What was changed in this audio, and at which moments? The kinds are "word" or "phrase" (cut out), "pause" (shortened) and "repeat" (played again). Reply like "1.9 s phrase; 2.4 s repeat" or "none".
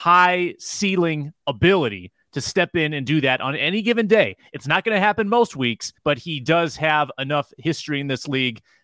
6.0 s pause